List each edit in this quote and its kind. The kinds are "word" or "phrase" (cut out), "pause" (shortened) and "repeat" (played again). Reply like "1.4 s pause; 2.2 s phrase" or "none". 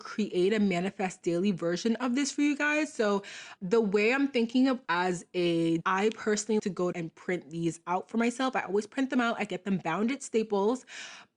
3.6 s word; 4.8 s phrase; 5.8 s phrase; 6.6 s word; 6.9 s word